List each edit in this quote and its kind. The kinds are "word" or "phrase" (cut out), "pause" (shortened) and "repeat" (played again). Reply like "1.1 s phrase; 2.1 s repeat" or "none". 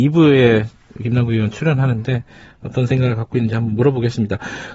none